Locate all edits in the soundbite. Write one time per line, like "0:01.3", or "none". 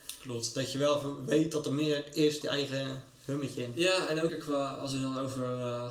0:02.4
0:04.3